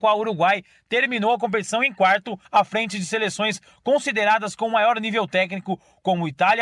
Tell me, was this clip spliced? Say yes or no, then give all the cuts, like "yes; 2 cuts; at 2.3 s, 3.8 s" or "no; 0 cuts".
yes; 1 cut; at 2.4 s